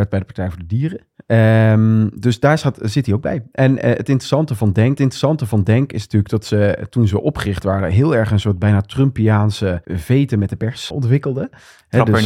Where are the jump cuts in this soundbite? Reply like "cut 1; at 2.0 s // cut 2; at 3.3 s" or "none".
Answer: cut 1; at 5.0 s // cut 2; at 9.8 s // cut 3; at 10.9 s